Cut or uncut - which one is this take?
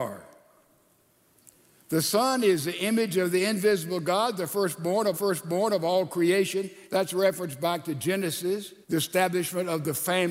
cut